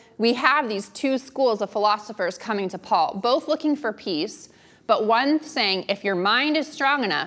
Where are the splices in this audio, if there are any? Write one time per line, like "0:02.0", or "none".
none